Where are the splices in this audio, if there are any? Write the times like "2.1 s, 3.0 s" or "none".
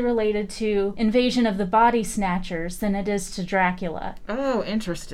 none